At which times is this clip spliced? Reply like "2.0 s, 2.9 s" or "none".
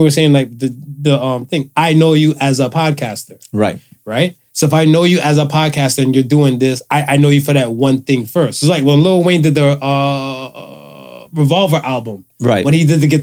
none